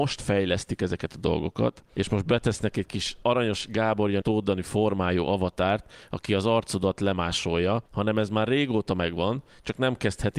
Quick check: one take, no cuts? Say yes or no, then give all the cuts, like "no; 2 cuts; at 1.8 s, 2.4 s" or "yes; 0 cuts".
no; 1 cut; at 4.2 s